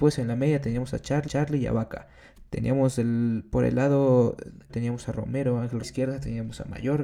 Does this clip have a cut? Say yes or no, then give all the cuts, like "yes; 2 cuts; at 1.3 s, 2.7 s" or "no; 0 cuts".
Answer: yes; 3 cuts; at 1.3 s, 4.7 s, 5.8 s